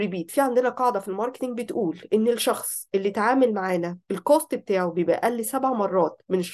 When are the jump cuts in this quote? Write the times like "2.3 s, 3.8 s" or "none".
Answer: 4.0 s

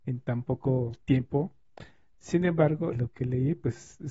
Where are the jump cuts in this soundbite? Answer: 2.9 s

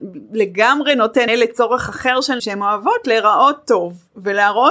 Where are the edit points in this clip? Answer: 1.3 s, 2.4 s

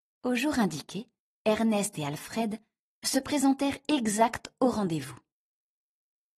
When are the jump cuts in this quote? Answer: 1.2 s

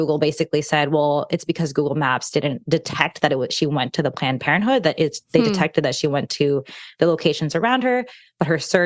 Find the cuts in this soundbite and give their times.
none

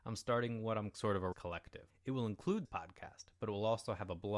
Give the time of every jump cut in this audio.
0.9 s, 1.3 s, 1.9 s, 2.6 s

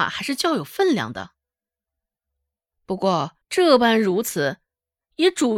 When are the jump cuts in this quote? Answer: 3.4 s

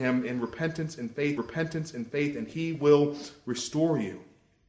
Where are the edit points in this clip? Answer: 1.4 s

